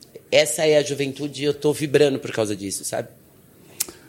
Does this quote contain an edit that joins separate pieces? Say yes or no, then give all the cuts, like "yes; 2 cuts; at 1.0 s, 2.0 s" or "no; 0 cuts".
no; 0 cuts